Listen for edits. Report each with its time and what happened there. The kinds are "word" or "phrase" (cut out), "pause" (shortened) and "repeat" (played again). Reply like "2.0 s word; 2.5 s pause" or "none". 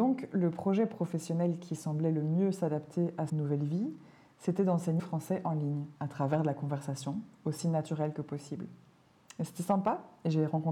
3.3 s word; 5.0 s word; 6.0 s pause